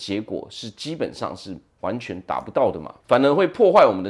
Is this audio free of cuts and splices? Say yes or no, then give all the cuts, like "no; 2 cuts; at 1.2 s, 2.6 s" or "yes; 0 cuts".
no; 1 cut; at 3.0 s